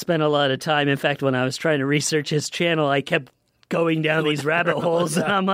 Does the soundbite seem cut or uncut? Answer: uncut